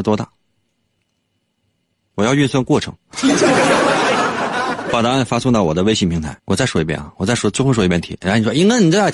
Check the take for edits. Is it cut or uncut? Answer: cut